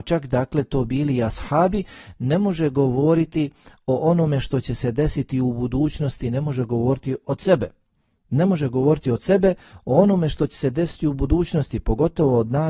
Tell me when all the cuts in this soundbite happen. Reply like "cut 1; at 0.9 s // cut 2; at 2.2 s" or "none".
none